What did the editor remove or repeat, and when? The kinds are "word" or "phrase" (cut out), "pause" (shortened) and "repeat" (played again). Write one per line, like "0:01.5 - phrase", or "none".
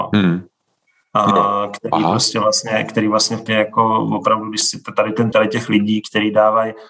0:03.5 - word
0:05.3 - word